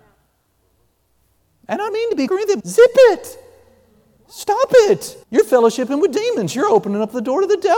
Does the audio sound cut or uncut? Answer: cut